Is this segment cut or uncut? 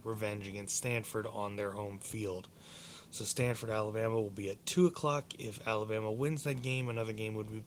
uncut